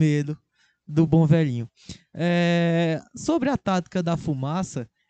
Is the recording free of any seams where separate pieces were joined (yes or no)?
yes